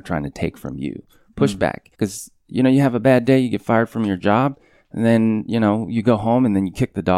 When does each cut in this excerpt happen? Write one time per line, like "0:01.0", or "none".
0:01.9